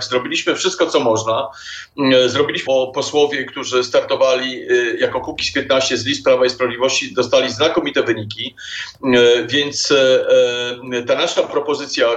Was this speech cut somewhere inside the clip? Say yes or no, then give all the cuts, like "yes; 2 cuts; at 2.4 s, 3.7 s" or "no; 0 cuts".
yes; 1 cut; at 2.7 s